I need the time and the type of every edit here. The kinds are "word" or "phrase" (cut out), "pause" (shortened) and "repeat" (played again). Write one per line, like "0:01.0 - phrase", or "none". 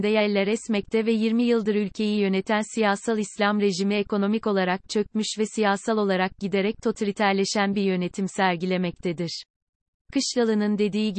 none